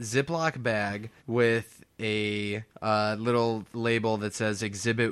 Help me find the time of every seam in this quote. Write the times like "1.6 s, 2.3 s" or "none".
1.2 s, 2.7 s, 3.7 s